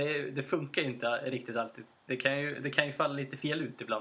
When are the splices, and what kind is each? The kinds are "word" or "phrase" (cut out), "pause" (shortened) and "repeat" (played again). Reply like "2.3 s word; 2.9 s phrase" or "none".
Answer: 1.9 s pause